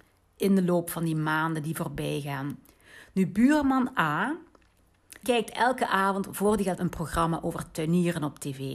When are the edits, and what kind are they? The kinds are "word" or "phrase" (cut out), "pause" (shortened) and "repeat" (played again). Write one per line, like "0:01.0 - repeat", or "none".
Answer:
0:05.2 - word
0:06.8 - word